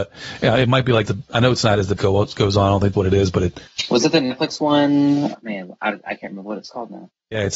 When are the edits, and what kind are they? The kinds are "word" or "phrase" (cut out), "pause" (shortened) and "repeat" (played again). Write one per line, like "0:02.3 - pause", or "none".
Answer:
0:01.1 - word
0:02.0 - word
0:02.9 - word
0:05.3 - word